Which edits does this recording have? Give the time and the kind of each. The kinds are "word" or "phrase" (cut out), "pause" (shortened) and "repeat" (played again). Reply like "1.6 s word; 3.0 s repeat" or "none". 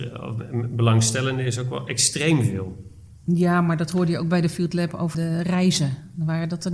5.1 s word